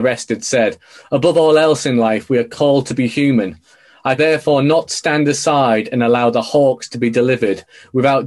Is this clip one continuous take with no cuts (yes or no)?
no